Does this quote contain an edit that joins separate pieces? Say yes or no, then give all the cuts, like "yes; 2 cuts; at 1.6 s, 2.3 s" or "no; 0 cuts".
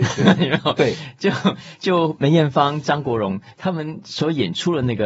no; 0 cuts